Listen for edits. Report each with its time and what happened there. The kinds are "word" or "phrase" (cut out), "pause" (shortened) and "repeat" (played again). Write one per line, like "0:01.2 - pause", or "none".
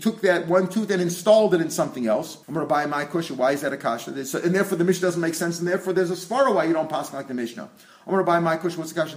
0:02.4 - pause